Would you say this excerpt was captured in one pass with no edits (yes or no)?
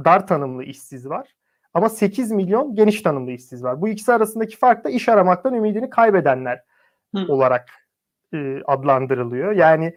yes